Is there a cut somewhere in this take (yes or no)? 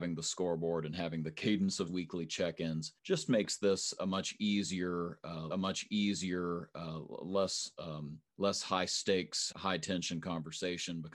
yes